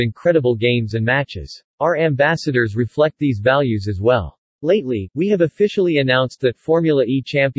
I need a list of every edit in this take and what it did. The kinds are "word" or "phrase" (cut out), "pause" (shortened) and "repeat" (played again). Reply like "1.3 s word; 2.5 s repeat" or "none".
1.7 s pause